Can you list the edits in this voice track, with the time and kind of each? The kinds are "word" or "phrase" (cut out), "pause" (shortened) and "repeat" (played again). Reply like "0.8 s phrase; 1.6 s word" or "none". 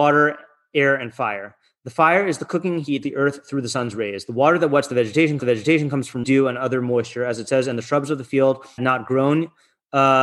3.0 s phrase; 5.4 s repeat; 6.2 s word; 8.8 s word